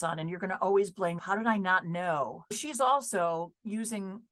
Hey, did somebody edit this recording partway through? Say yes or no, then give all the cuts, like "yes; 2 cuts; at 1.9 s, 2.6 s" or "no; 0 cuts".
yes; 2 cuts; at 1.2 s, 2.5 s